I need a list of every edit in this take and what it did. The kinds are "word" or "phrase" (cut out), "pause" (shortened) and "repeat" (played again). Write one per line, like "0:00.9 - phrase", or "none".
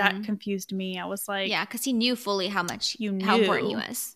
none